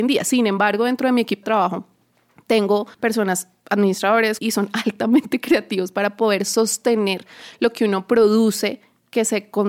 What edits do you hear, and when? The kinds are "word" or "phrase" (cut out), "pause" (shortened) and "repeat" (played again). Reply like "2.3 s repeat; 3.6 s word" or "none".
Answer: 1.4 s word; 2.9 s pause; 4.4 s word

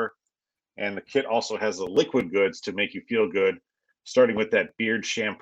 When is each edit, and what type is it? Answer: none

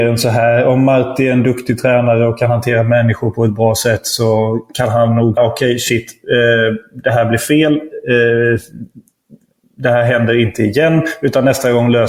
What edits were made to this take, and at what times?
5.4 s word

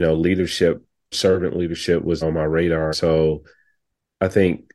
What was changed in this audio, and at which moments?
1.1 s word; 2.2 s word; 2.9 s word

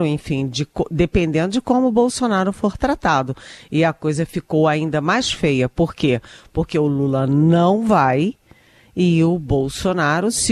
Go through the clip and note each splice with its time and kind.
none

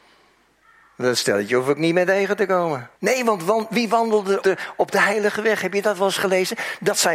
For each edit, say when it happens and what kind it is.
3.0 s pause; 4.4 s word

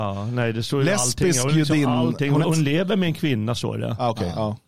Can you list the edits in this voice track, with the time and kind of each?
2.4 s word

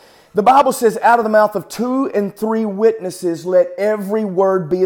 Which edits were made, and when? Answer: none

